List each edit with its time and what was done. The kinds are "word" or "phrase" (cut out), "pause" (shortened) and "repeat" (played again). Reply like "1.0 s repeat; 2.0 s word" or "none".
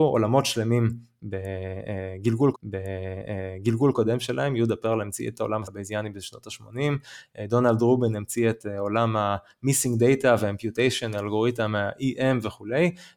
2.5 s repeat; 5.6 s word